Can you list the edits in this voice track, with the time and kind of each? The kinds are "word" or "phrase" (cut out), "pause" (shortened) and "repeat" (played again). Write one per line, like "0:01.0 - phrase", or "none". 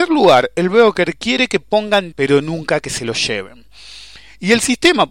0:02.1 - word